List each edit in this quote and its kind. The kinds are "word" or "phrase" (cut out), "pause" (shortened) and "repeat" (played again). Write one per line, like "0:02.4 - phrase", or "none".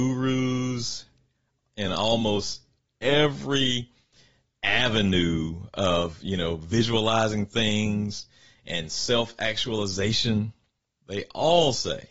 none